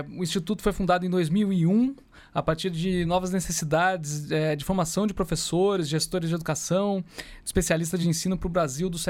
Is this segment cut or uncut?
uncut